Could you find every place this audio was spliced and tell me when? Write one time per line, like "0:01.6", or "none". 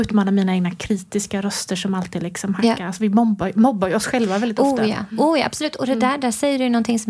none